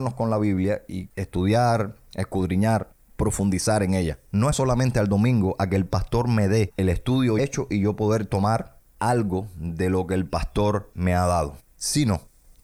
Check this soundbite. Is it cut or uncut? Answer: cut